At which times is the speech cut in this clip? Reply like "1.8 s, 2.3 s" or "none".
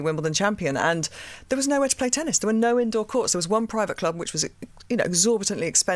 none